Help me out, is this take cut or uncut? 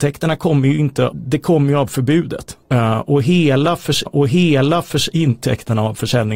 cut